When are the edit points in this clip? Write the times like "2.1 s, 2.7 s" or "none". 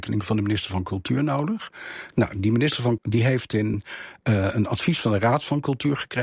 3.0 s, 3.7 s

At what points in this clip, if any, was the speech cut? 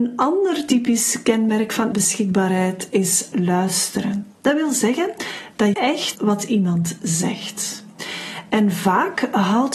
1.9 s, 3.3 s, 5.7 s, 6.1 s

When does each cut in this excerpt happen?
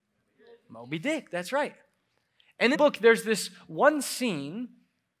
2.7 s

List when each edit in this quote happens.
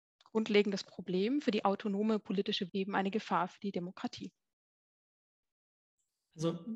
2.7 s

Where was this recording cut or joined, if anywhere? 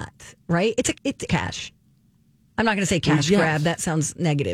0.9 s, 1.3 s

